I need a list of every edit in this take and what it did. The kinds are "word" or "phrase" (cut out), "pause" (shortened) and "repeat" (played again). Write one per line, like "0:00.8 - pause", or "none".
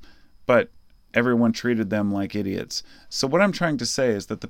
none